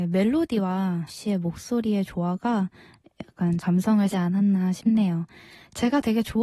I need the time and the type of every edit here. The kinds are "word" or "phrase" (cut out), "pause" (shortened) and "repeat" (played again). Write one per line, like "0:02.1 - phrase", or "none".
0:01.1 - word
0:03.6 - word
0:04.1 - word